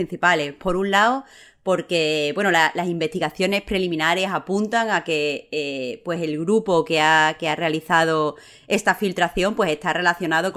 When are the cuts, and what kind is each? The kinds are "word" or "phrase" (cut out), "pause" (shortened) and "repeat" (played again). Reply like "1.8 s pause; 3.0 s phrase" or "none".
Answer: none